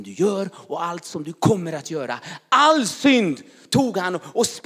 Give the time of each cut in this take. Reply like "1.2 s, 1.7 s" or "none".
none